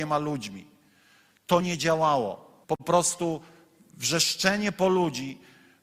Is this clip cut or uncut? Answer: cut